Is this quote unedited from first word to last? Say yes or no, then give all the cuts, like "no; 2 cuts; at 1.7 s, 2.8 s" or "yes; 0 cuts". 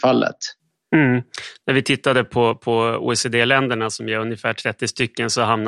yes; 0 cuts